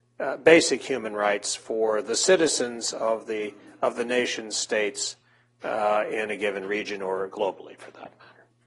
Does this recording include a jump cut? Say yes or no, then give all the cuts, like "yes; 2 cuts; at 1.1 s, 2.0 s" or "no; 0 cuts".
no; 0 cuts